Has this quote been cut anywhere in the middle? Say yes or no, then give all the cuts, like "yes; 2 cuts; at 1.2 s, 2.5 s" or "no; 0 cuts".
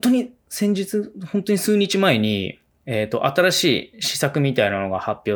no; 0 cuts